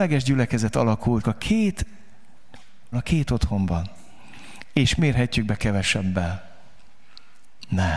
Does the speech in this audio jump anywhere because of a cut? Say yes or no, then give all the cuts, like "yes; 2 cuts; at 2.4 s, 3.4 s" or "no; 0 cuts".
yes; 3 cuts; at 1.2 s, 2.9 s, 5.0 s